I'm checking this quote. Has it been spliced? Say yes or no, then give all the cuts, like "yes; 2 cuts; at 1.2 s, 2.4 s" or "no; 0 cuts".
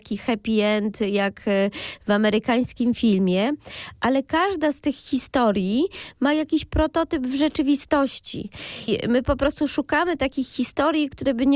no; 0 cuts